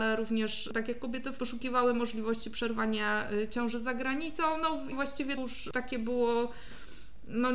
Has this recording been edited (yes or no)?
yes